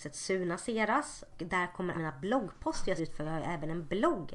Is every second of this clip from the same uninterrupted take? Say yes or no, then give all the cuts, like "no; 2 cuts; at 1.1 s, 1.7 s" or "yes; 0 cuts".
no; 3 cuts; at 1.3 s, 1.9 s, 3.0 s